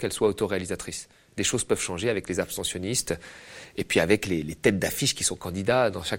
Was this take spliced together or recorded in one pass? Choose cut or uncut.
uncut